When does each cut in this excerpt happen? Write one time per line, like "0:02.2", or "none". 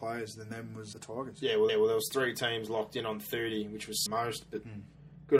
0:00.9
0:01.7
0:04.1